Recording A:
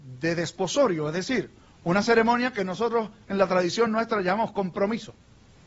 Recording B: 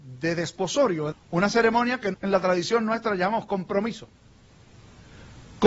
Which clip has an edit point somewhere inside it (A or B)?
B